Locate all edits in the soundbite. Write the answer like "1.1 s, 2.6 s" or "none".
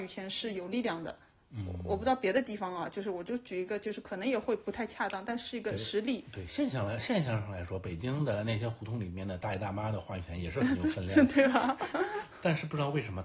none